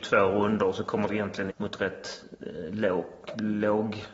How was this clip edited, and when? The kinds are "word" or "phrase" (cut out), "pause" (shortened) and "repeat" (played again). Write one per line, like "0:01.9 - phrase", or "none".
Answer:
0:01.1 - word
0:01.5 - phrase